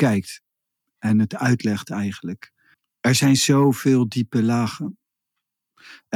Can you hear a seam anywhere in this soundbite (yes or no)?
no